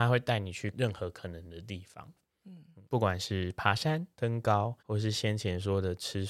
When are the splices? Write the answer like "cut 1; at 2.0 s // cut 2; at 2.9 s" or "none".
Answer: cut 1; at 2.8 s // cut 2; at 4.8 s